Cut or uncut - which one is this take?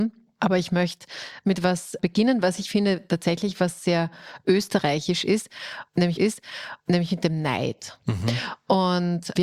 cut